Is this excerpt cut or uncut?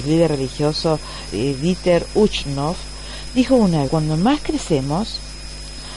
cut